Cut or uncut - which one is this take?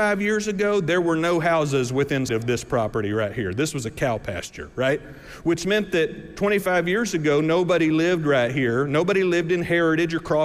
cut